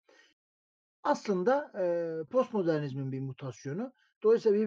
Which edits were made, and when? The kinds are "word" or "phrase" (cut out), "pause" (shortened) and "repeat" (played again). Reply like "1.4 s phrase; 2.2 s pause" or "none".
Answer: 2.3 s phrase